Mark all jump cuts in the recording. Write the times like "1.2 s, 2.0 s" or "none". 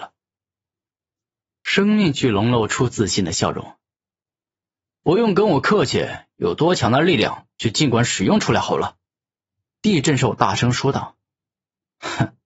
9.1 s